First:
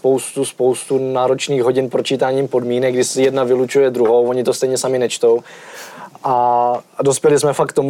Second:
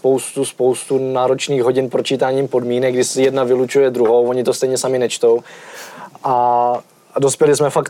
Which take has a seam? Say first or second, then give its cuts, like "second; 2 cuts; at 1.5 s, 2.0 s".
first; 1 cut; at 6.9 s